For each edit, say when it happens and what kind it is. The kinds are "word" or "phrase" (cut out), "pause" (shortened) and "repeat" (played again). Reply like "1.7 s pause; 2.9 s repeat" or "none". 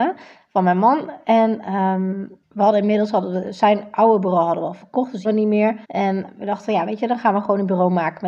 2.4 s pause; 5.2 s word; 5.8 s pause